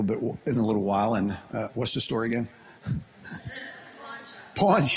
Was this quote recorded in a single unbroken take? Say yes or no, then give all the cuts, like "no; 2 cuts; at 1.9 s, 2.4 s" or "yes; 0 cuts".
yes; 0 cuts